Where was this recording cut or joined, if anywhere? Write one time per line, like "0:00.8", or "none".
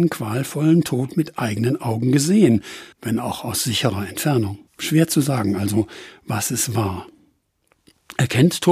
0:02.9
0:04.7